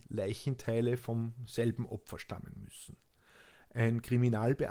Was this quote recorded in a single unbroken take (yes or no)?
yes